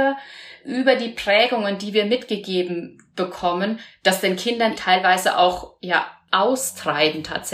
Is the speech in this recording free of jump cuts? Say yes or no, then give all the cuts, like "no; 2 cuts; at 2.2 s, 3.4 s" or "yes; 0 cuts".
no; 1 cut; at 4.7 s